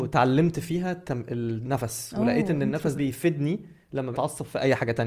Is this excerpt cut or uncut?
cut